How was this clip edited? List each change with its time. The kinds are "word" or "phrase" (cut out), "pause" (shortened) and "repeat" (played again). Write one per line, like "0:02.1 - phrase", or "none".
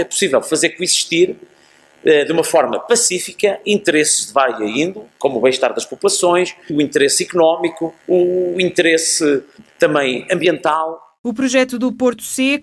0:08.0 - pause